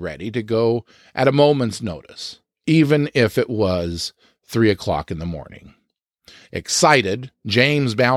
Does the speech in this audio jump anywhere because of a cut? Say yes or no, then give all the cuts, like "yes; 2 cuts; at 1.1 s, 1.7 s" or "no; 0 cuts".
no; 0 cuts